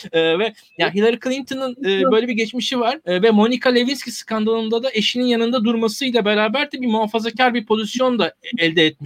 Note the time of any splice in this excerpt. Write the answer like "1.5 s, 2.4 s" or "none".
3.0 s